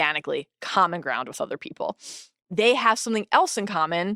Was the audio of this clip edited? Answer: no; 0 cuts

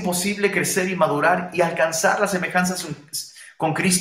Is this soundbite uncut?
yes; 0 cuts

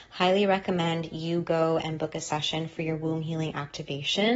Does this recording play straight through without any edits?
yes; 0 cuts

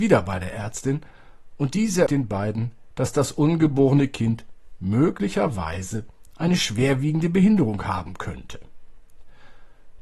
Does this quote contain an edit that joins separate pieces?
yes; 1 cut; at 2.1 s

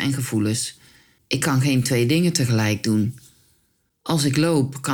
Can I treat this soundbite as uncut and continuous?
yes; 0 cuts

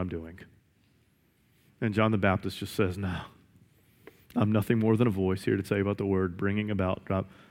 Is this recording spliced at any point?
no; 0 cuts

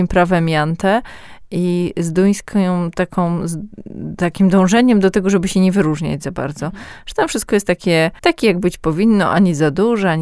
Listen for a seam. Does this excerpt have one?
yes; 1 cut; at 8.2 s

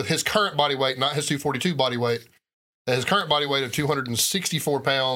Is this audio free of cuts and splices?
yes; 0 cuts

